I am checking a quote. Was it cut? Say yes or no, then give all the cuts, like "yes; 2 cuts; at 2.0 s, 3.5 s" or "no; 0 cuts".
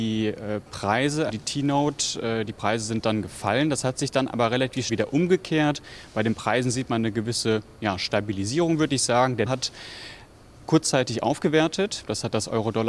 yes; 3 cuts; at 1.3 s, 4.9 s, 9.5 s